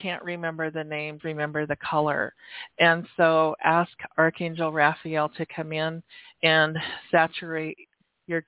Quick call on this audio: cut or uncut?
cut